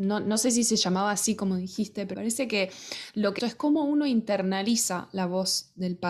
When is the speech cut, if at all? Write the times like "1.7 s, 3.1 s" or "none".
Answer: 2.1 s, 3.4 s